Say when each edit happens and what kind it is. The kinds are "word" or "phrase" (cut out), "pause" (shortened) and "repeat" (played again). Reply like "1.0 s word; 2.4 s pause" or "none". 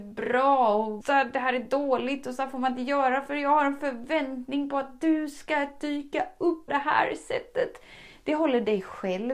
1.0 s word; 6.7 s word